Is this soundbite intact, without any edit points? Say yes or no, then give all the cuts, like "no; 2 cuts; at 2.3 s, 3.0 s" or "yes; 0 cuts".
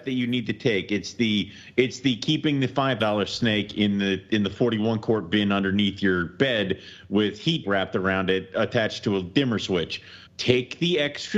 no; 3 cuts; at 3.0 s, 7.6 s, 10.3 s